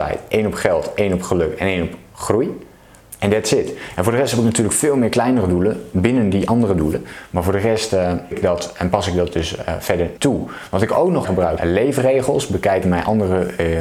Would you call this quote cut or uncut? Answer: cut